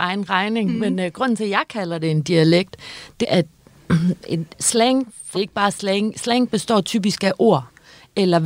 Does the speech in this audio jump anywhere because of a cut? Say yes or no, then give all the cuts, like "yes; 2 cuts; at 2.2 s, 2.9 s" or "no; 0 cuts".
yes; 3 cuts; at 3.2 s, 4.5 s, 5.3 s